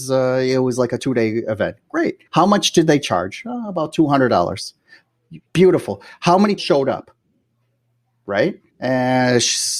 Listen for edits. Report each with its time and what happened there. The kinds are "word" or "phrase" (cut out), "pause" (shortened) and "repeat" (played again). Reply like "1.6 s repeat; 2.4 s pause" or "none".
2.3 s pause; 5.5 s pause; 6.6 s word; 8.7 s pause